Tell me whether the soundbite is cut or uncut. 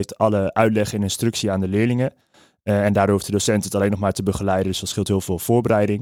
uncut